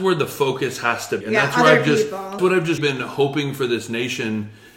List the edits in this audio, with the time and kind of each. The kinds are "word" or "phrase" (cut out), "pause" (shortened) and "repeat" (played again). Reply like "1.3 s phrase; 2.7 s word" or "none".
1.2 s word; 2.4 s word; 2.8 s word